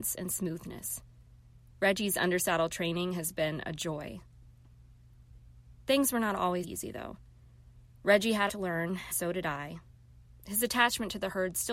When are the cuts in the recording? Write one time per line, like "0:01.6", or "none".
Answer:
0:06.6
0:08.5
0:09.1